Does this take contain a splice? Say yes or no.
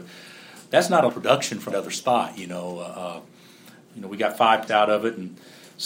yes